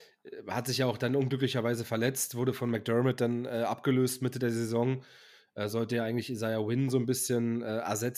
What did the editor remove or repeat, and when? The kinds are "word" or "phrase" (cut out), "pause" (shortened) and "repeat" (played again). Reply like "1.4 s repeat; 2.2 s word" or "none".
none